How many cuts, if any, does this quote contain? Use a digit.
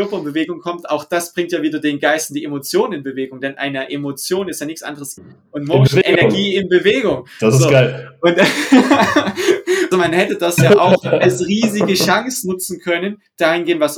2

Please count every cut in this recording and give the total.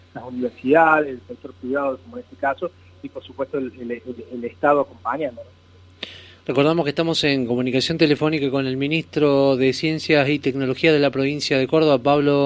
0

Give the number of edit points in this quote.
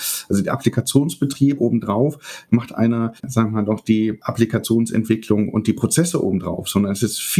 2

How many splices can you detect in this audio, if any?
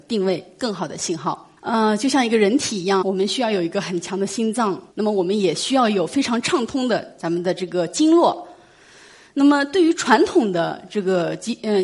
3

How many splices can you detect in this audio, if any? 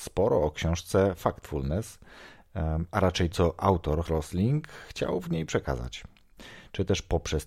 2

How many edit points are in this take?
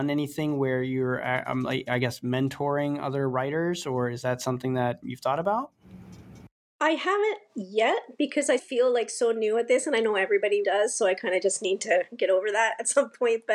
3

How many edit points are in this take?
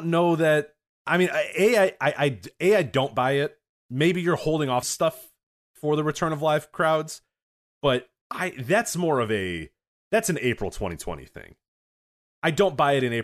1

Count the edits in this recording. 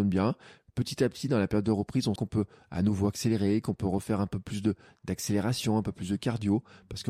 1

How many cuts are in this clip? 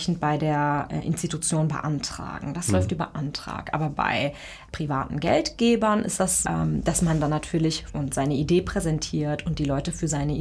3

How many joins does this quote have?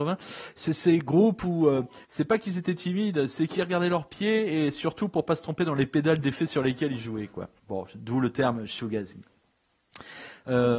2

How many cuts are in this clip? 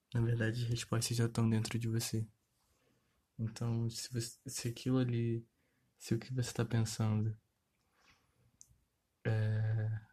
0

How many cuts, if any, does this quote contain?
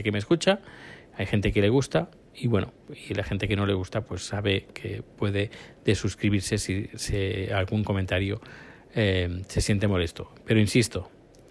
0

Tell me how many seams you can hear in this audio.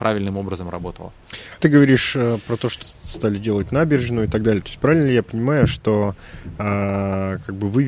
2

